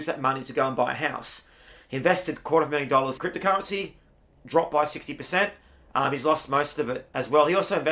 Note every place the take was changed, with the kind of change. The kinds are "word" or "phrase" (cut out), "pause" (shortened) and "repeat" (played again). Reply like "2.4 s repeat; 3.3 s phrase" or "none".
3.2 s word